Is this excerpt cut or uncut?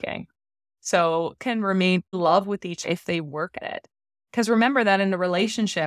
cut